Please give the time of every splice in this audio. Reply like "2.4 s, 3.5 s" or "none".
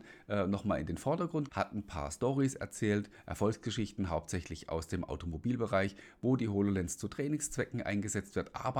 1.5 s